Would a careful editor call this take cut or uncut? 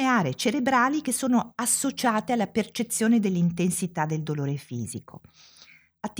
uncut